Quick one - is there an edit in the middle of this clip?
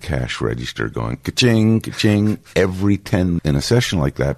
yes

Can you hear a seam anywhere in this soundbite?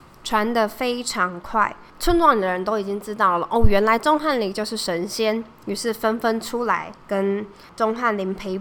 yes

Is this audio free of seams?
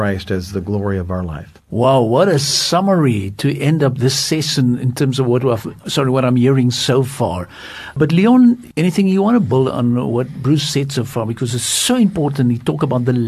no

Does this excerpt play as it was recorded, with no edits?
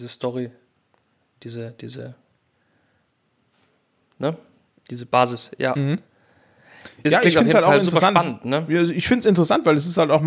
yes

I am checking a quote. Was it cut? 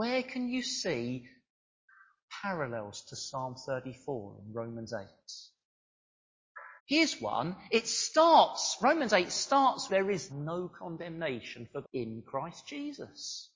yes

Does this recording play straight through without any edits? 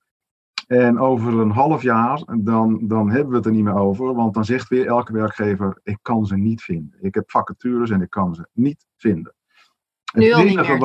yes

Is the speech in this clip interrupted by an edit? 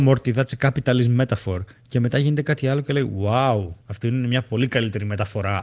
yes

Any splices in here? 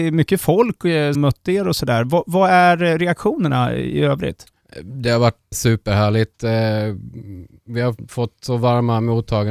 yes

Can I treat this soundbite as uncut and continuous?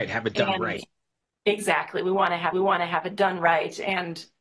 no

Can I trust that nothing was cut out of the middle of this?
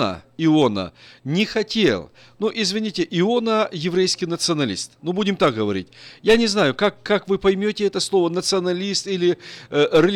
yes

